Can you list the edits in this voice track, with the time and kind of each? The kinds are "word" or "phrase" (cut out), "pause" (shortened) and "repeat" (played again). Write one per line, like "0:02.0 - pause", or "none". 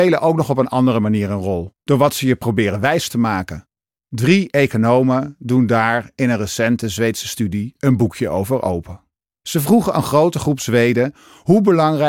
0:01.8 - pause
0:03.8 - pause
0:09.1 - pause